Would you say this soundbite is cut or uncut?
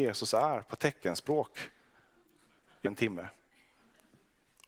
cut